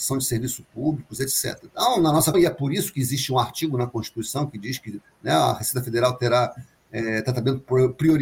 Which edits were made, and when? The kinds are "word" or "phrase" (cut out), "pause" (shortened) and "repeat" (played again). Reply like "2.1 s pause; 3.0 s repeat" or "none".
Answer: 1.7 s pause; 2.3 s word